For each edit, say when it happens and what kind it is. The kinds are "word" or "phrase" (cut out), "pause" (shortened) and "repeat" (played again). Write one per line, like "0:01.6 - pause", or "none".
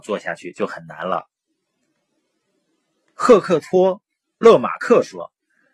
none